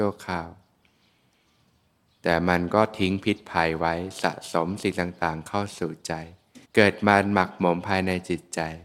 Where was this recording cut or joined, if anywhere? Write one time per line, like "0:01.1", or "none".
0:06.6